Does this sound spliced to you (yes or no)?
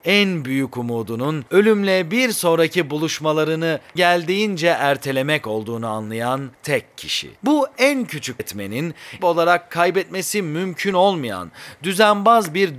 yes